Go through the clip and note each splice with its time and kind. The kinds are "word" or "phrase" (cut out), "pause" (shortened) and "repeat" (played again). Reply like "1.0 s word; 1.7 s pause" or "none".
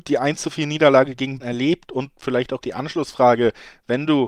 1.4 s word; 2.6 s word